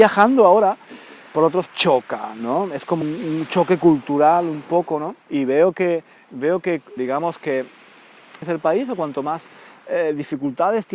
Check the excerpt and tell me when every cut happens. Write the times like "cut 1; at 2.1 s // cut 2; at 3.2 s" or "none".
cut 1; at 1.7 s // cut 2; at 3.0 s // cut 3; at 5.2 s // cut 4; at 7.0 s // cut 5; at 8.4 s